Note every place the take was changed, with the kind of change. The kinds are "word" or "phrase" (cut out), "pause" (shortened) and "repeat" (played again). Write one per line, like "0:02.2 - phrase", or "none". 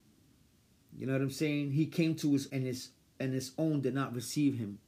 0:02.5 - word